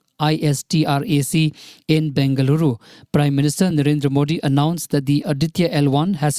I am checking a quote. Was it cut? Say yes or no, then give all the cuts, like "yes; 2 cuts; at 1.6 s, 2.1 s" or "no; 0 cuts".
no; 0 cuts